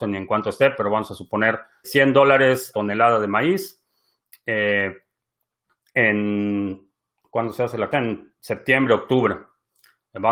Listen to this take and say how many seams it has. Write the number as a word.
three